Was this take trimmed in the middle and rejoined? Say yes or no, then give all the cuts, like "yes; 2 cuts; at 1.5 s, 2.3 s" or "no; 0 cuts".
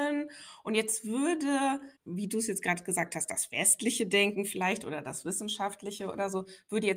yes; 1 cut; at 2.0 s